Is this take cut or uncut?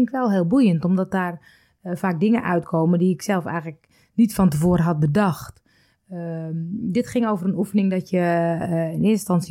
uncut